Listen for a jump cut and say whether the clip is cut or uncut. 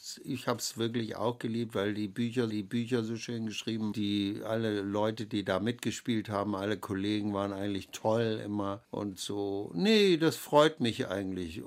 cut